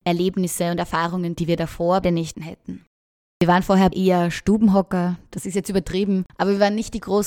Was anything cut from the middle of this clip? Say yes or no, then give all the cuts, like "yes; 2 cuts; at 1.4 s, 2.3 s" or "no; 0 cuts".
yes; 4 cuts; at 1.3 s, 2.0 s, 2.3 s, 3.9 s